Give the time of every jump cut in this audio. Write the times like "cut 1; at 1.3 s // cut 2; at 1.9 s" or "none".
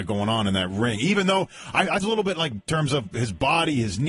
cut 1; at 2.0 s // cut 2; at 2.7 s